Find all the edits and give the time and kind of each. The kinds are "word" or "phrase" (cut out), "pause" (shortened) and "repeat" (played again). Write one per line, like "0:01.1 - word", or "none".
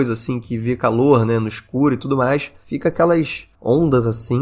none